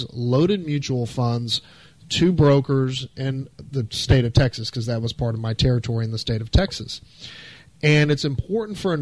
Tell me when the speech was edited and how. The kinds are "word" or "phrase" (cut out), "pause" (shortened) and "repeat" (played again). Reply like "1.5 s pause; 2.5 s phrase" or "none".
none

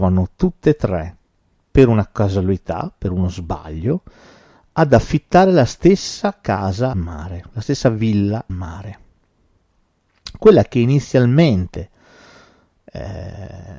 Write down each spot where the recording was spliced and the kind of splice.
6.9 s word; 8.5 s word

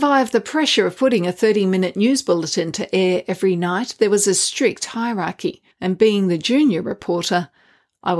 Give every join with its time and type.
5.7 s pause

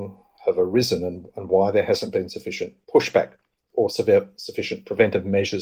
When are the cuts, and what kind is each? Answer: 2.8 s pause

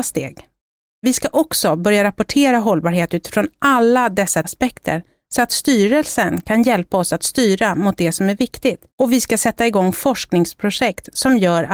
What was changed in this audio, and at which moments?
4.4 s word; 8.9 s pause

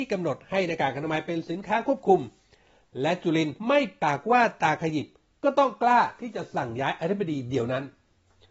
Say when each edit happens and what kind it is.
3.6 s pause

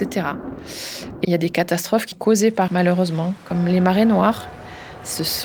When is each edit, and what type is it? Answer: 1.2 s word; 2.1 s word; 2.7 s word

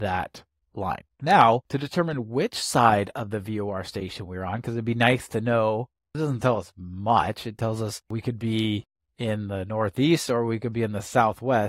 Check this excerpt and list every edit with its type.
8.0 s pause

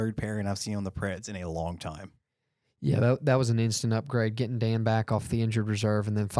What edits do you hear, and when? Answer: none

